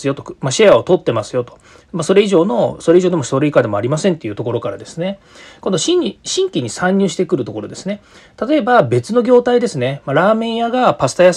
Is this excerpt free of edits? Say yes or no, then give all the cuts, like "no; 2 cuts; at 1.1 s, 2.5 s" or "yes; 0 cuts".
yes; 0 cuts